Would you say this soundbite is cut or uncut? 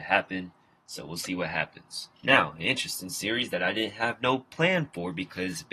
cut